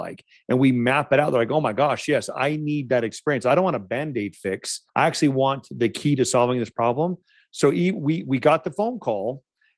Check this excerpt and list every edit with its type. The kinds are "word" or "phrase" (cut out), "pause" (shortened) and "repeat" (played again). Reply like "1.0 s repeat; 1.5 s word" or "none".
4.9 s pause

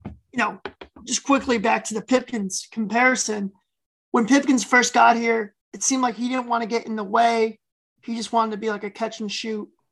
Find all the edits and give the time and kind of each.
5.6 s pause

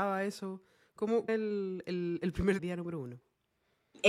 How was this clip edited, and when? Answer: 1.3 s word; 2.6 s word

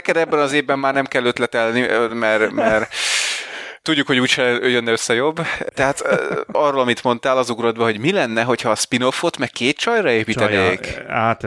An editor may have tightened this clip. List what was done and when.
none

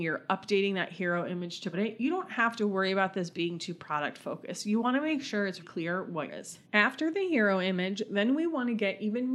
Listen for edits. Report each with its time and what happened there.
1.7 s word; 5.6 s word; 6.3 s phrase; 6.6 s pause

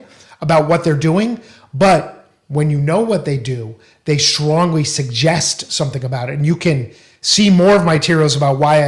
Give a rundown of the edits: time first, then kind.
none

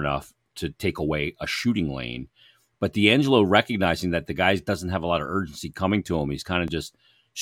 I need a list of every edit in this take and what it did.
none

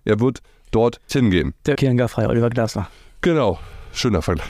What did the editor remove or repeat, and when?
1.1 s word; 1.8 s word

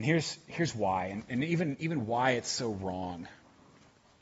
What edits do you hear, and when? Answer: none

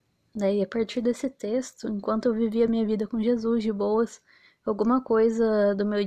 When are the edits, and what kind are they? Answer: none

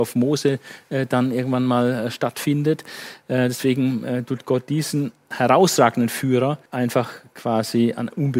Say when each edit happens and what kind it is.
6.7 s pause

